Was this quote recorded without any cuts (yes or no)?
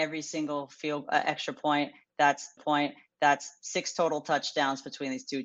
no